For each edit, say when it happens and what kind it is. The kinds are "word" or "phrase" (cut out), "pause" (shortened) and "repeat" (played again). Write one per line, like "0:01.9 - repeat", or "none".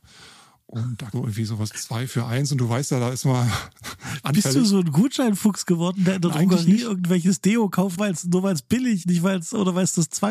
0:01.1 - word
0:01.7 - word
0:08.0 - word
0:09.0 - word